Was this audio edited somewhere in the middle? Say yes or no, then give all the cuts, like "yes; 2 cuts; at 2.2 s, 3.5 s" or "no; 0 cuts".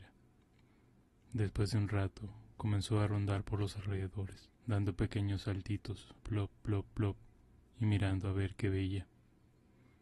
yes; 2 cuts; at 4.5 s, 6.2 s